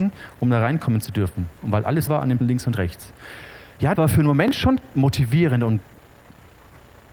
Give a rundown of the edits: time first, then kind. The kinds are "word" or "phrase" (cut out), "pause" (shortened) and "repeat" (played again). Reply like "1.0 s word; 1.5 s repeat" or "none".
2.1 s word; 2.4 s word; 4.0 s word